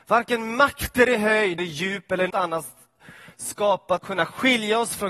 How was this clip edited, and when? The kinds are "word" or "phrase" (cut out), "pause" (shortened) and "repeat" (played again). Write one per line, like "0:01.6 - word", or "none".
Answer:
0:01.6 - word
0:02.3 - word
0:04.0 - word